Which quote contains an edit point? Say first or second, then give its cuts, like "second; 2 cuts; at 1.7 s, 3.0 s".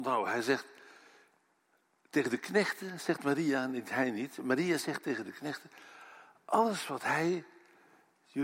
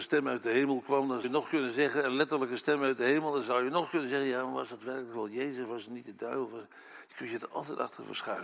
second; 1 cut; at 1.2 s